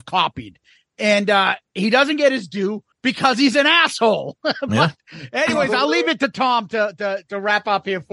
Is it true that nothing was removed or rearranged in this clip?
no; 1 cut; at 2.9 s

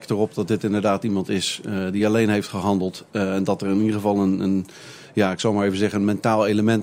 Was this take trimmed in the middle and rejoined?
no; 0 cuts

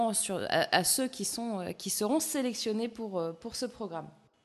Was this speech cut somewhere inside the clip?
no; 0 cuts

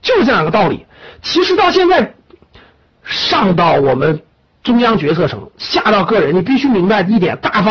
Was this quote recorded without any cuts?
yes; 0 cuts

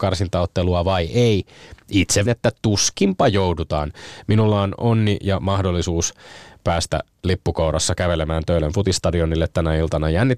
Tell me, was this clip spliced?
yes; 1 cut; at 2.2 s

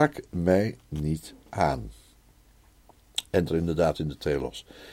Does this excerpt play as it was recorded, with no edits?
no; 1 cut; at 3.5 s

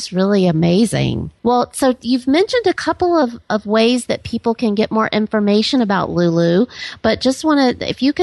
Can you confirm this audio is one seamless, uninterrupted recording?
no; 1 cut; at 1.4 s

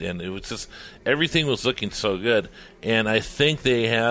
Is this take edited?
no; 0 cuts

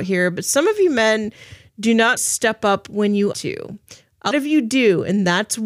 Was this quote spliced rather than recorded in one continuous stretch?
yes; 3 cuts; at 2.2 s, 3.3 s, 4.3 s

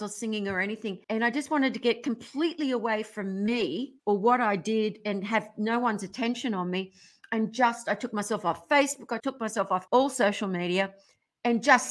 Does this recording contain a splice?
yes; 4 cuts; at 1.0 s, 4.0 s, 9.2 s, 9.9 s

